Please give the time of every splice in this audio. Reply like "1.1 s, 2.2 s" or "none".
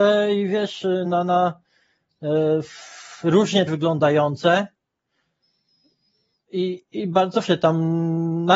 1.0 s, 3.7 s, 6.9 s, 7.4 s